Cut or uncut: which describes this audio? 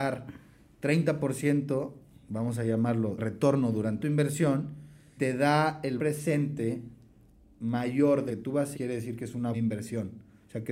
cut